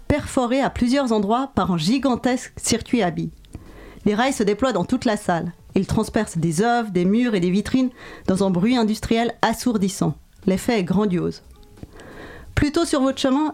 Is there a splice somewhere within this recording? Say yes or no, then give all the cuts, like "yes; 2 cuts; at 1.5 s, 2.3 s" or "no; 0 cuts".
no; 0 cuts